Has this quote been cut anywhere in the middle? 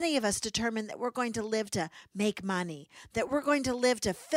no; 0 cuts

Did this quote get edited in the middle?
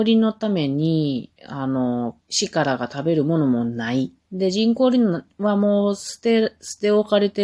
yes; 2 cuts; at 2.2 s, 4.2 s

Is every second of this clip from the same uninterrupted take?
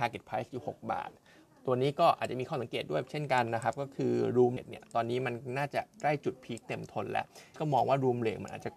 no; 2 cuts; at 4.6 s, 7.5 s

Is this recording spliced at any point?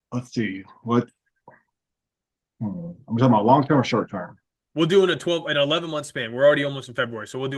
no; 0 cuts

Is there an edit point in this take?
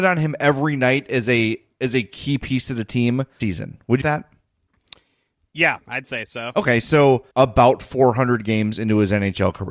yes; 3 cuts; at 3.4 s, 4.0 s, 7.3 s

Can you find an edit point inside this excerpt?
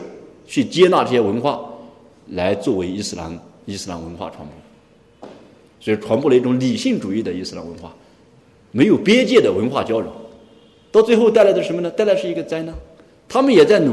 no; 0 cuts

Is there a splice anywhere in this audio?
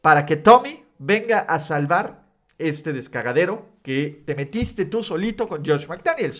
no; 0 cuts

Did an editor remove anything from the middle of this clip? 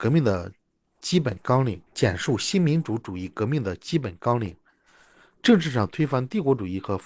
yes; 1 cut; at 1.9 s

